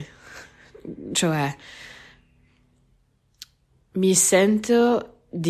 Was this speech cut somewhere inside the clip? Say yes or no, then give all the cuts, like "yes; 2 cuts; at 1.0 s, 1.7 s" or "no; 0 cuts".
yes; 1 cut; at 3.6 s